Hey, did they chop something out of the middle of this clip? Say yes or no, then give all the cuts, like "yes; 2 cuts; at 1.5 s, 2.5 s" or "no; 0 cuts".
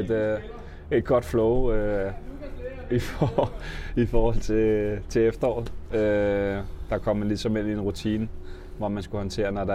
no; 0 cuts